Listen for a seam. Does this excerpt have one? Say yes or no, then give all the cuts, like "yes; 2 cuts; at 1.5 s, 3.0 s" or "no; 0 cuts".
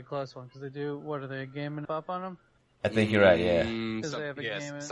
yes; 2 cuts; at 1.8 s, 2.6 s